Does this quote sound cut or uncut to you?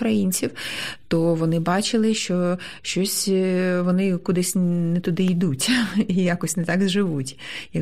uncut